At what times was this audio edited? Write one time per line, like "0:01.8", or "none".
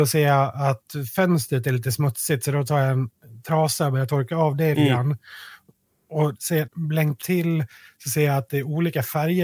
0:04.7
0:06.3
0:06.7
0:07.2